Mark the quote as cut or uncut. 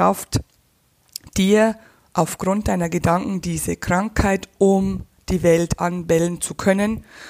uncut